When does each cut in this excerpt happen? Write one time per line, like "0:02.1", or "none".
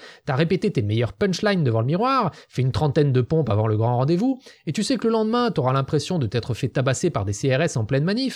none